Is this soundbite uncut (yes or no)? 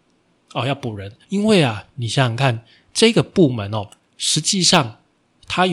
no